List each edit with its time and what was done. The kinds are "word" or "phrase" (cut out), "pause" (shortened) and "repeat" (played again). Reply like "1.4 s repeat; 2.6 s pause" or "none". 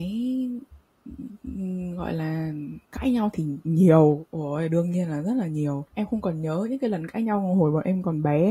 2.8 s pause; 5.9 s pause